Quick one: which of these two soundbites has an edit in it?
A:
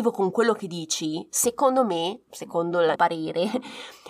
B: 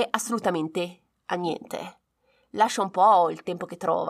A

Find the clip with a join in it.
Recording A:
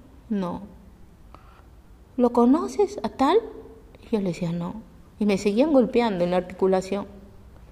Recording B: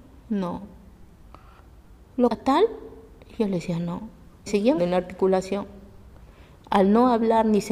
B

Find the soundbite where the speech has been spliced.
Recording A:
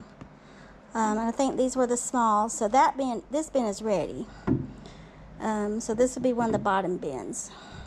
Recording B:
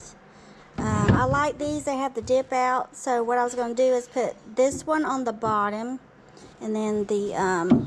B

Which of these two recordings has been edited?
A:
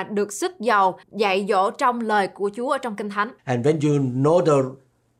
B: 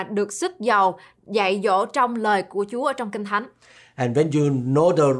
A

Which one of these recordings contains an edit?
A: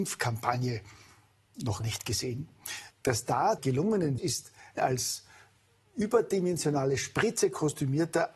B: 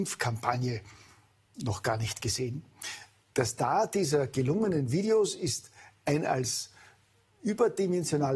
A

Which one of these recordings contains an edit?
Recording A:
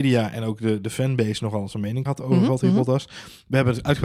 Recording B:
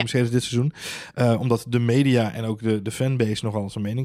A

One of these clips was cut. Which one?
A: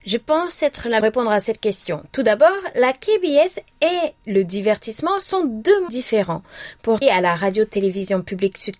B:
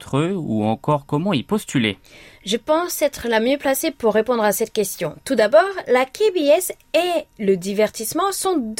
A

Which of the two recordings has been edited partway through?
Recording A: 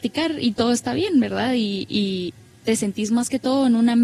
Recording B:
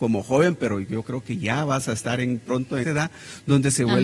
B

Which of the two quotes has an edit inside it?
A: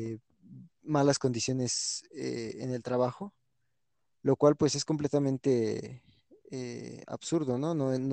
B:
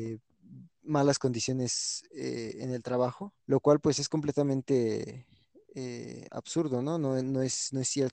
B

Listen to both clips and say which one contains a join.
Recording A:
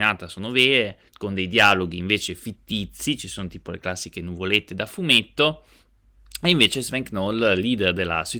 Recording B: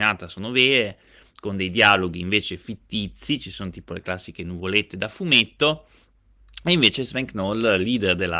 A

